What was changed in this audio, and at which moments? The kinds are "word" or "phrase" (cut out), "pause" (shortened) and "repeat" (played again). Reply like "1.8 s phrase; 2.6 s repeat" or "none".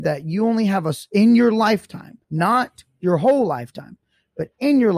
2.2 s pause